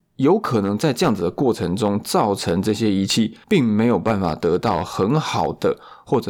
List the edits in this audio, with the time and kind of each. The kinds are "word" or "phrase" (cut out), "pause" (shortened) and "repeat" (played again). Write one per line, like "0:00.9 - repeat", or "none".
0:03.4 - pause

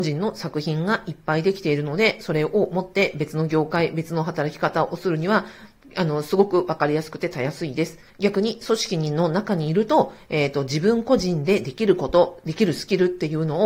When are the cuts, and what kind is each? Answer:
0:08.1 - pause

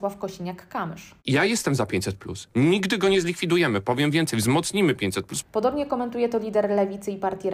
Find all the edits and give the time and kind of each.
0:01.2 - pause

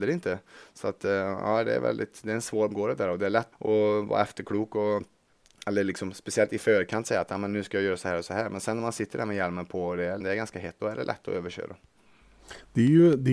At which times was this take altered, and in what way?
0:02.7 - word
0:03.5 - word
0:10.2 - word
0:10.8 - word

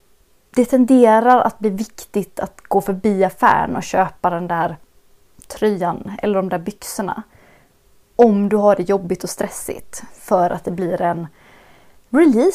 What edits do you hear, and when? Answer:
none

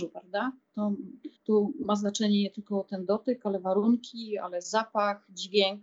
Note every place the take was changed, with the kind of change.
0:01.4 - pause

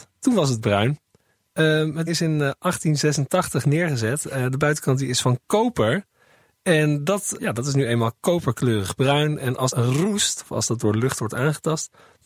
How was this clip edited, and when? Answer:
0:02.1 - word
0:07.4 - word
0:09.7 - word

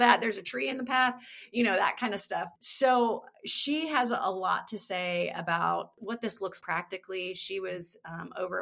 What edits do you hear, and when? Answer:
0:02.6 - pause
0:06.6 - word

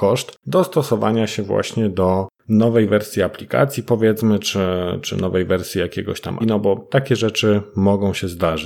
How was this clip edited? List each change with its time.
0:06.4 - word

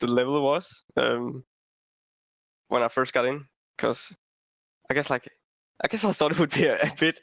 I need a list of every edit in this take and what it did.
none

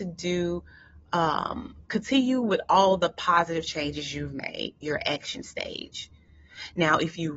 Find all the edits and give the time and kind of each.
0:01.8 - pause
0:04.8 - word

